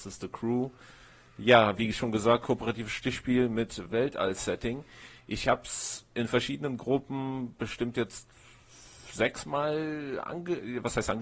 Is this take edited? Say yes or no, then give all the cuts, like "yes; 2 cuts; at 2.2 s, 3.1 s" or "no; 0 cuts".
no; 0 cuts